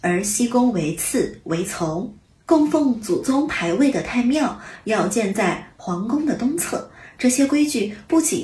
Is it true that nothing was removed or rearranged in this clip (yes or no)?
no